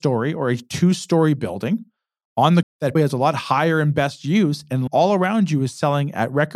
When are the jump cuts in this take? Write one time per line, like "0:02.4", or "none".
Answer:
0:02.6
0:03.0
0:04.9